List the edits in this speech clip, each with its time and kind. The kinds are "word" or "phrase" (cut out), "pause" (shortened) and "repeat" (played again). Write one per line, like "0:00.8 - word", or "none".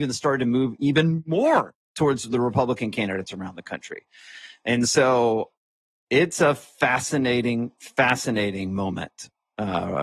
none